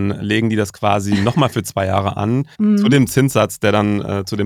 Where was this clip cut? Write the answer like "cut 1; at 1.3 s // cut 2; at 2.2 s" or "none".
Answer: cut 1; at 2.5 s